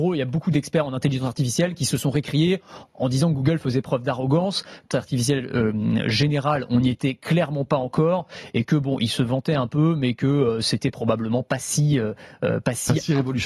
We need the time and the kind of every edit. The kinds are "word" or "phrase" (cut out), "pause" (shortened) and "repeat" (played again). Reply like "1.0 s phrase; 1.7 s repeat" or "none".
4.9 s word